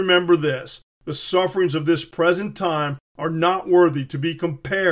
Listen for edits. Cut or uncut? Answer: uncut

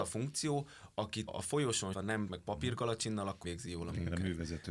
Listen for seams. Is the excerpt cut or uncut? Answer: cut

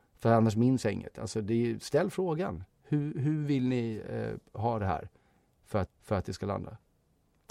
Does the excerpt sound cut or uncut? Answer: cut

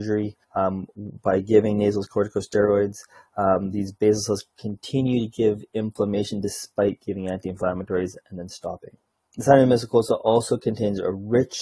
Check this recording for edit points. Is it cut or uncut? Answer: uncut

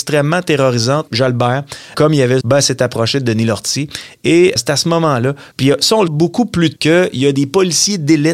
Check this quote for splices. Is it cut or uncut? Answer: cut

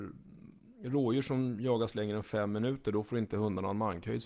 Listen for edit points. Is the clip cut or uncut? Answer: uncut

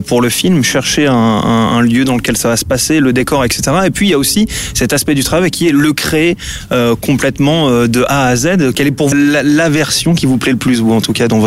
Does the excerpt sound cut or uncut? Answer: cut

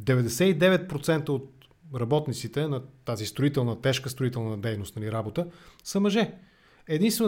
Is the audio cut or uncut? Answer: uncut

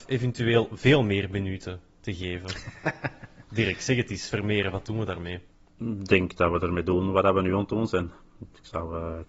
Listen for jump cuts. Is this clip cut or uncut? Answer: cut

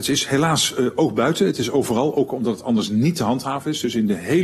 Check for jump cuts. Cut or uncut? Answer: uncut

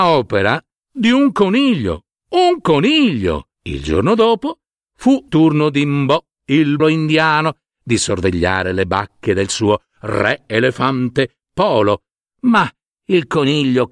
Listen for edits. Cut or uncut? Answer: cut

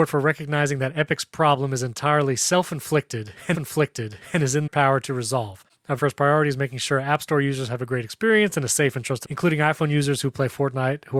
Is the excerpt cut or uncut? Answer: cut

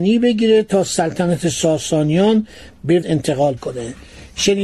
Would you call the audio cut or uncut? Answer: cut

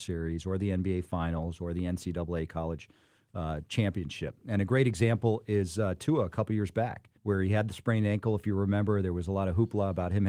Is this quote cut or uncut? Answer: cut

